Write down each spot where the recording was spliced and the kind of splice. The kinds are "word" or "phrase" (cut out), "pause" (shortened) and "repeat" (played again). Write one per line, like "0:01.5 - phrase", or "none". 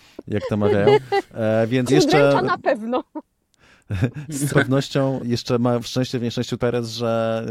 0:01.9 - word
0:04.5 - word
0:05.2 - word
0:05.8 - word
0:06.6 - word